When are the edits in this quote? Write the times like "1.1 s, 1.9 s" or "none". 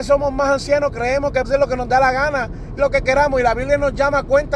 1.4 s, 2.8 s